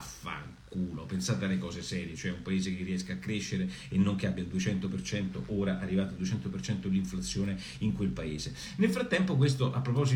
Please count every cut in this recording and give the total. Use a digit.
0